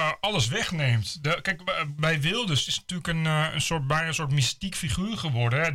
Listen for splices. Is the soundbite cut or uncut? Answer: uncut